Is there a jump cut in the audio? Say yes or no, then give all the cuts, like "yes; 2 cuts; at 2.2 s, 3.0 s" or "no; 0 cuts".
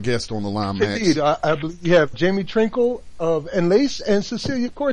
yes; 1 cut; at 2.1 s